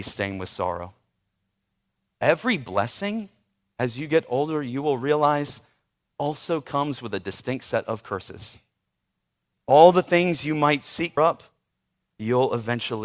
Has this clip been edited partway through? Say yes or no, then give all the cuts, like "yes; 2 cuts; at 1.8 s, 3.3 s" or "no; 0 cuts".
yes; 1 cut; at 11.2 s